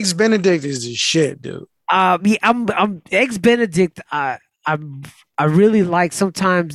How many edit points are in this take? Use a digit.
0